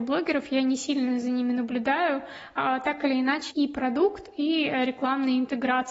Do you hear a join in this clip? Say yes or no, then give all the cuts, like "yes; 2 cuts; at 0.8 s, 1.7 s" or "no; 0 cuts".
yes; 1 cut; at 3.5 s